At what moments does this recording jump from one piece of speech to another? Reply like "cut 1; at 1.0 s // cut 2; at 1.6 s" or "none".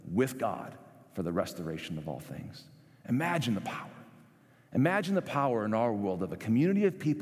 none